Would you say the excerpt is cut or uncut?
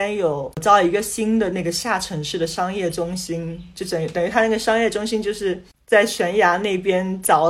uncut